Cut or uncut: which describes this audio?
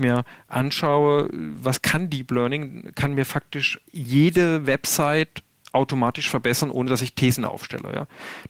cut